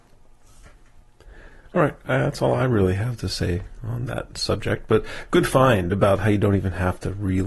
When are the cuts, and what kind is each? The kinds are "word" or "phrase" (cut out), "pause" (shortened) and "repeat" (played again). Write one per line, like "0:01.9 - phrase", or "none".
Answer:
none